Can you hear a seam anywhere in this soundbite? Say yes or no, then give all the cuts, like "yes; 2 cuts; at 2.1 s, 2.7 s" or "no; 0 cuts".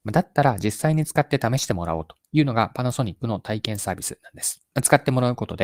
yes; 1 cut; at 4.7 s